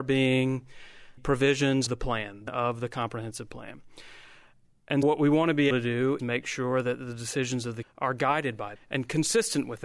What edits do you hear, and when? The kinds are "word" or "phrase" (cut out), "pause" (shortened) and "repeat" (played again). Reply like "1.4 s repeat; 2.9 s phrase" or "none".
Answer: 1.2 s word; 1.9 s word; 2.5 s word; 5.0 s word; 5.7 s word; 6.2 s word; 7.8 s word; 8.8 s word